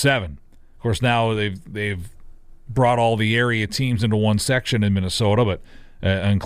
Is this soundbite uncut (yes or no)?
yes